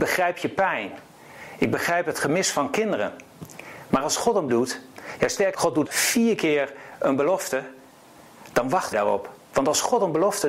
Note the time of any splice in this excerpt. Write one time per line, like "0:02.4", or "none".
0:04.5
0:05.5
0:05.8
0:08.9